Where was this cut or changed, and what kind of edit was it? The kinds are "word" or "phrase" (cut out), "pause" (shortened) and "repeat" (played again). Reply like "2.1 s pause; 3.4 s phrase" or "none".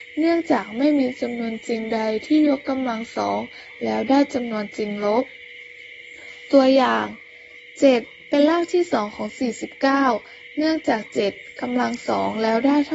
none